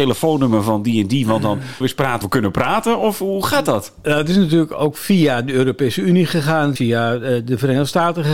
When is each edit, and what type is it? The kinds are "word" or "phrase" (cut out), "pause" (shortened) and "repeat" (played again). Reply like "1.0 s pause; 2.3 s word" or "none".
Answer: 1.8 s word; 2.2 s word; 6.8 s word